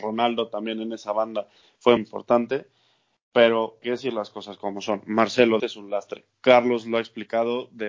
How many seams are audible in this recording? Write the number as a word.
three